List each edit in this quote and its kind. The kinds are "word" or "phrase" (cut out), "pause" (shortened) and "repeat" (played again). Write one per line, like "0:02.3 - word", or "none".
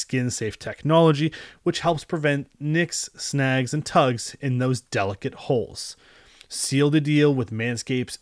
none